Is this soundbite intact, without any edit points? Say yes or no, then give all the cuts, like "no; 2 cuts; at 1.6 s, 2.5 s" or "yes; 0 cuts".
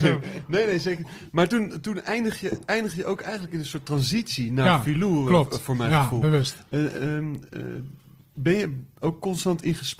yes; 0 cuts